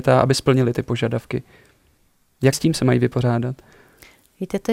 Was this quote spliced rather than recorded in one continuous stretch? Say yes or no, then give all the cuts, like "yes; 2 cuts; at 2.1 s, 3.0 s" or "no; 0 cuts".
yes; 1 cut; at 2.5 s